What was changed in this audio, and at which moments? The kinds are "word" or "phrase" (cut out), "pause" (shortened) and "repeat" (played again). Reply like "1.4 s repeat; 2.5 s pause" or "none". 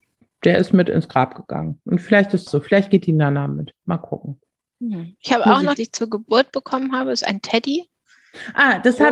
2.5 s phrase; 5.8 s phrase